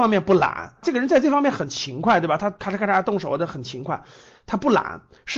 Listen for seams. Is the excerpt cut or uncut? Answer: uncut